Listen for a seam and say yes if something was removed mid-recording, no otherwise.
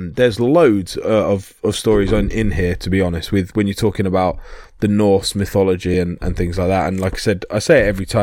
no